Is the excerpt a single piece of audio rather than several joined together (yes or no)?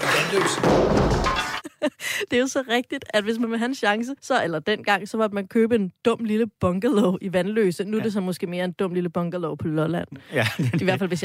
no